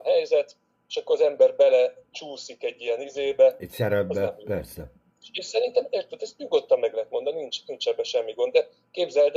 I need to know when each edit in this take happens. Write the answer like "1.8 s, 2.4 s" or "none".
none